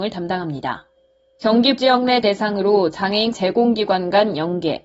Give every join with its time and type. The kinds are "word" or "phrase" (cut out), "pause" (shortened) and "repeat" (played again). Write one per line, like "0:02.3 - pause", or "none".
0:01.8 - word
0:02.2 - word
0:03.3 - word